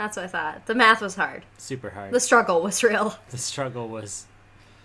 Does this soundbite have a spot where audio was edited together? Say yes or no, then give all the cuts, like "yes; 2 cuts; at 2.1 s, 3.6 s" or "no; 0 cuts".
yes; 1 cut; at 1.5 s